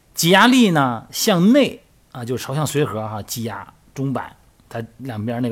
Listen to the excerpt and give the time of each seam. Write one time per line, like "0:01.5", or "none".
none